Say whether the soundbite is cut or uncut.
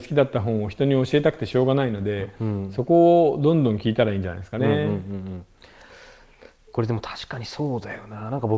uncut